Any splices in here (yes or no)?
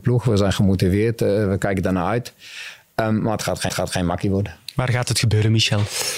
yes